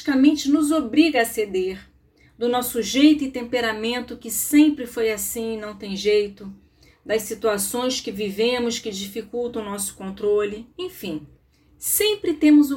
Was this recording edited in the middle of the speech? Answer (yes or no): no